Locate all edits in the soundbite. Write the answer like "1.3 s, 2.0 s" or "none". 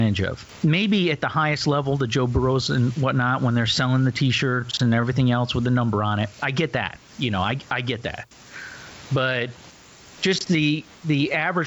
7.1 s